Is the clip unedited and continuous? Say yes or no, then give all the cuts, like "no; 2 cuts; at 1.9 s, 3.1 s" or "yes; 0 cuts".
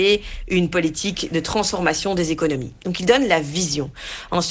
yes; 0 cuts